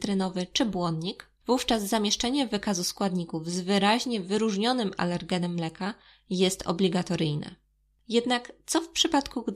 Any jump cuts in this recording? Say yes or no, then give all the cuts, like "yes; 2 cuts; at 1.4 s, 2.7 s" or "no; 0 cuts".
no; 0 cuts